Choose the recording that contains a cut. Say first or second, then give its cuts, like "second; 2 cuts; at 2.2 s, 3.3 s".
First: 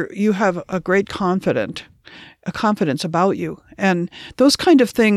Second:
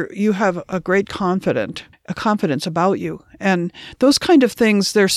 second; 1 cut; at 1.9 s